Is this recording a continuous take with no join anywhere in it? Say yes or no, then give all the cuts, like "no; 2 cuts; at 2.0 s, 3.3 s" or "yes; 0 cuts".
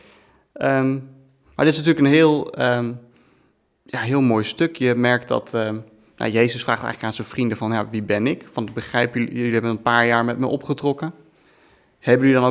yes; 0 cuts